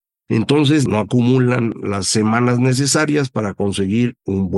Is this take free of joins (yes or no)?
yes